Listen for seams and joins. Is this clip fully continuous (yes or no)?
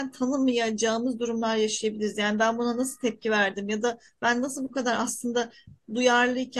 yes